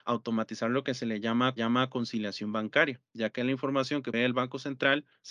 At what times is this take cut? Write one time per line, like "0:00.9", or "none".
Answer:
0:01.6
0:04.1

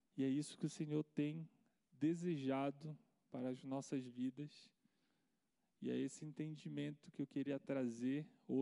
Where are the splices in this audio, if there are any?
none

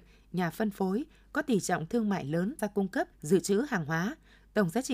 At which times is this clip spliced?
0:02.6
0:03.1

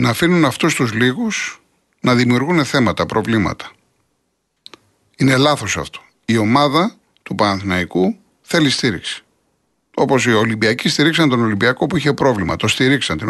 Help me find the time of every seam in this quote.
none

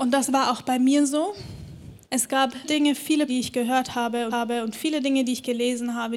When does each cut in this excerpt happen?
0:02.0
0:02.6
0:03.3
0:04.3

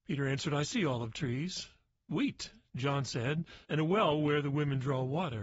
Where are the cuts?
0:03.6

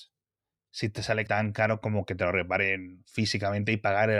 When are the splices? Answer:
0:01.3

